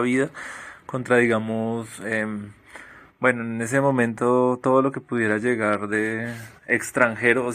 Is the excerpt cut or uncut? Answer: uncut